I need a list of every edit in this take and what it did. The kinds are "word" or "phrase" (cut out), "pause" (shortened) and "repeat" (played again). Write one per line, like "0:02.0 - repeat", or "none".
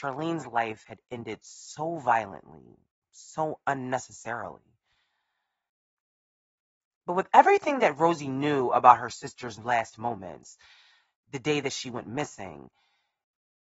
none